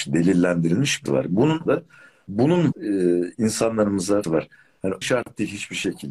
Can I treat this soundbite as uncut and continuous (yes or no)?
no